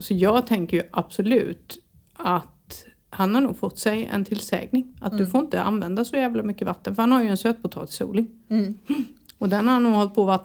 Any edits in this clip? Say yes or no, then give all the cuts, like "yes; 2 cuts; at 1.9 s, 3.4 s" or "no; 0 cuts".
no; 0 cuts